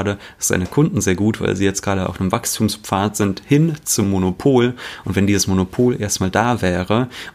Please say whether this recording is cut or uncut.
uncut